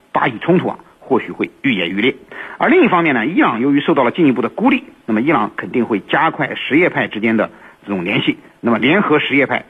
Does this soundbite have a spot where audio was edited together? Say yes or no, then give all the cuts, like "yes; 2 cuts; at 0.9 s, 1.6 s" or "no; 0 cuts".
no; 0 cuts